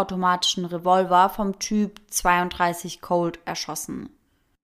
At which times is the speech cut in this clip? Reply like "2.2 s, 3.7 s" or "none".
none